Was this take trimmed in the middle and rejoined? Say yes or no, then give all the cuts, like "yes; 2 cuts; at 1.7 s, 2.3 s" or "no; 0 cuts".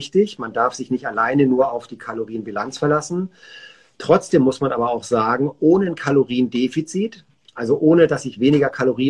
no; 0 cuts